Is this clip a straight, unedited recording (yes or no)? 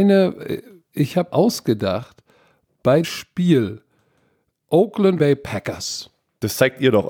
no